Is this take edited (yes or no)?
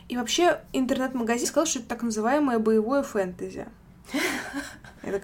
yes